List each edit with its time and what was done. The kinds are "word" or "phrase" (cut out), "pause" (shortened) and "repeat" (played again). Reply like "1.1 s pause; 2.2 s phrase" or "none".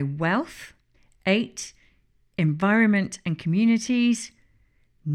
0.9 s pause